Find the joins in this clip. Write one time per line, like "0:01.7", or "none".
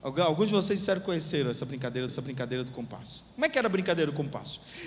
0:02.1